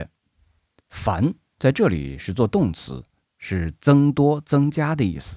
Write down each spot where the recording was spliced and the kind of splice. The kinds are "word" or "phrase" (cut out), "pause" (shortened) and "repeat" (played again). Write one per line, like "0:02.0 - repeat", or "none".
none